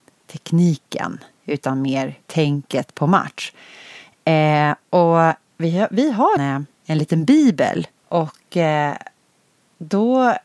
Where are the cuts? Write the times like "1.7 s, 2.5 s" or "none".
2.2 s, 6.4 s, 6.7 s, 8.0 s